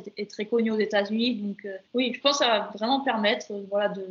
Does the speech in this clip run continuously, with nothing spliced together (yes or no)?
no